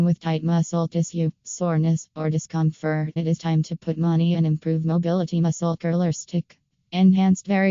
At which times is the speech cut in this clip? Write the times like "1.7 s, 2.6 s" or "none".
3.2 s, 4.3 s